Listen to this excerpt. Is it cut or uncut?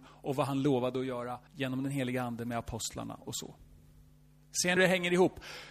cut